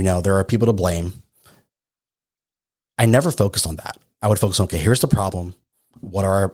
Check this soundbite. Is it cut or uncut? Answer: uncut